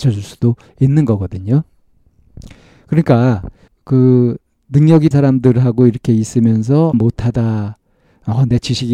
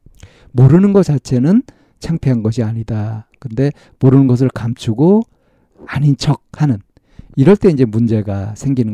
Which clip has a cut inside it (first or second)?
first